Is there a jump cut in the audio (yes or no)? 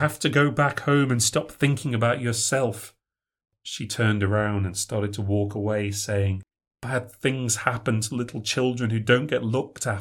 no